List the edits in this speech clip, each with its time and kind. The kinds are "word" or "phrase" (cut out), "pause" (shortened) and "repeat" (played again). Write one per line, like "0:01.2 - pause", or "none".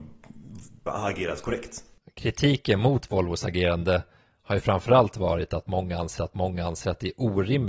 0:06.2 - repeat